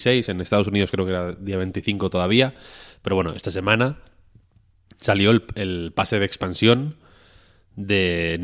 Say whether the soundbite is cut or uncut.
uncut